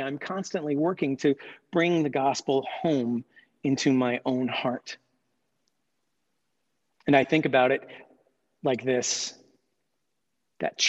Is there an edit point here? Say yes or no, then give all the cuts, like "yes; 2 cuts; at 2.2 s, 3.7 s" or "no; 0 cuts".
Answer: no; 0 cuts